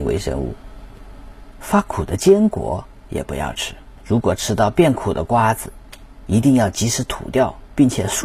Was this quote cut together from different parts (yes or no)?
yes